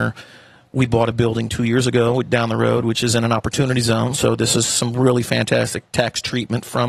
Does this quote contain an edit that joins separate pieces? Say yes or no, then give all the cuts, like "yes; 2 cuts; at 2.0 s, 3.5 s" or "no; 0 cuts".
no; 0 cuts